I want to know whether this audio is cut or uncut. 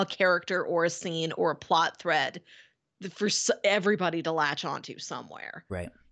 uncut